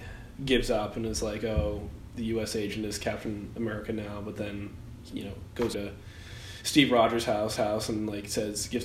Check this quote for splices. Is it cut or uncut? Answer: cut